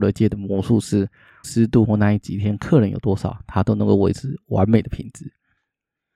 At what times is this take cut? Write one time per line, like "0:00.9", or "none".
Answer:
0:01.4